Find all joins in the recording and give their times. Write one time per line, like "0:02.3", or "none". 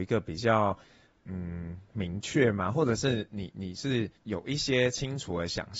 0:04.2